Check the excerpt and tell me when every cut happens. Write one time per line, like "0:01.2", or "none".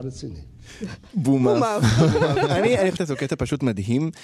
0:03.0